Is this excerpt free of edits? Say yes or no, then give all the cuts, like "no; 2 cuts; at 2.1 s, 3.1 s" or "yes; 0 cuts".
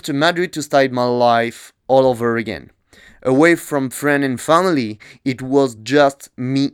yes; 0 cuts